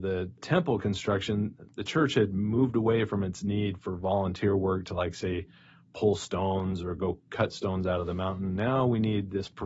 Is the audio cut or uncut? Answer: uncut